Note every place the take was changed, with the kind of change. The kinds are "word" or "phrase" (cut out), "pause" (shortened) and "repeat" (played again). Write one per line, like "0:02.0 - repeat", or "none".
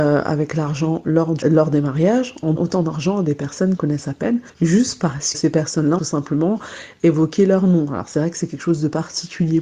0:01.4 - word
0:02.6 - word
0:03.8 - word
0:04.5 - pause
0:05.3 - word
0:06.0 - phrase

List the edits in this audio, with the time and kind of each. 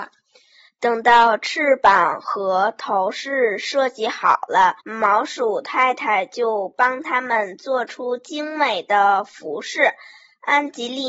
0:04.8 - pause

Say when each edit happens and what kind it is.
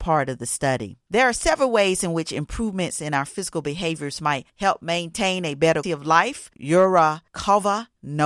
0:05.8 - word

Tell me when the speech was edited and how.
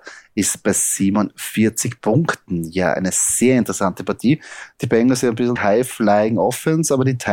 0:05.6 - word

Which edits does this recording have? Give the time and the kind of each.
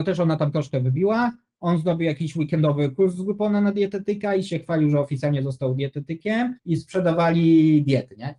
0:06.6 - pause

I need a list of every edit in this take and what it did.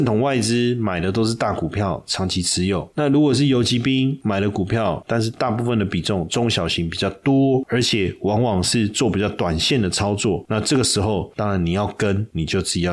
0:05.0 - phrase

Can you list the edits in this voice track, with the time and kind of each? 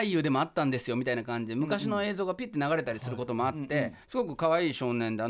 0:04.0 - pause

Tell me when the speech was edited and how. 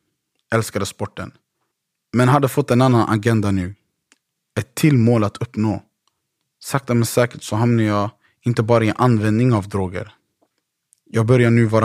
none

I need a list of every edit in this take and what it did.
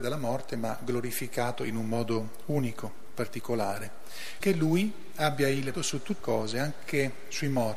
0:04.4 - word
0:05.7 - word
0:06.2 - word

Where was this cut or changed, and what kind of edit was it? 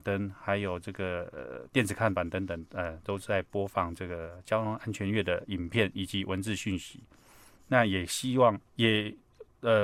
0:08.7 - pause

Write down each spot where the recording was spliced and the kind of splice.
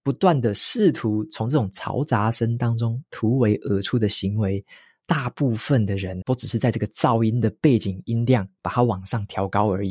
0:06.2 - word

